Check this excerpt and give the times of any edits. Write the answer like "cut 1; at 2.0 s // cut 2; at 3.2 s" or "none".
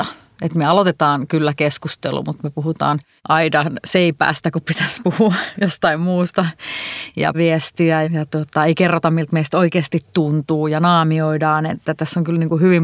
cut 1; at 3.2 s // cut 2; at 7.3 s // cut 3; at 8.0 s